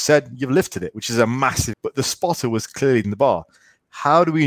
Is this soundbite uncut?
no; 2 cuts; at 1.7 s, 3.0 s

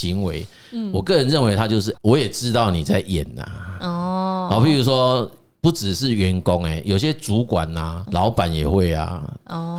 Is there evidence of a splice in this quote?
yes; 2 cuts; at 1.9 s, 8.1 s

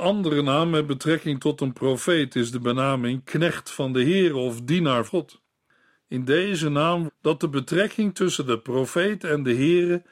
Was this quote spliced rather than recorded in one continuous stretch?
yes; 2 cuts; at 5.1 s, 7.1 s

